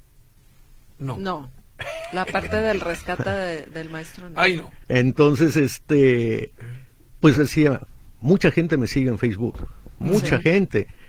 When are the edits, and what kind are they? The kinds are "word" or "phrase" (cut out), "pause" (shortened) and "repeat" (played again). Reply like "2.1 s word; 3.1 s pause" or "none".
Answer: 4.8 s pause; 7.3 s phrase